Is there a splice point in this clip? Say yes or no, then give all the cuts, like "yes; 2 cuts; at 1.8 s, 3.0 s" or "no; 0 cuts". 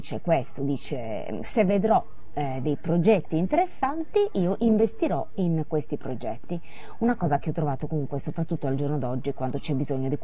no; 0 cuts